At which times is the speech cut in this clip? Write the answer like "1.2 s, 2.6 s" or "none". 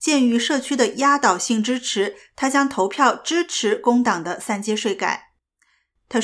none